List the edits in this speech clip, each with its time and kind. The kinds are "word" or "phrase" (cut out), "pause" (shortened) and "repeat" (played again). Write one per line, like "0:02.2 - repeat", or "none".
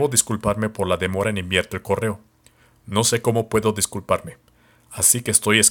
none